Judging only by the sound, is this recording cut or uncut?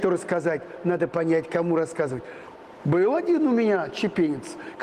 uncut